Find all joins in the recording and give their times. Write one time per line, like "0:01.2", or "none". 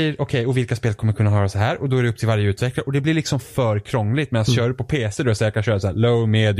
none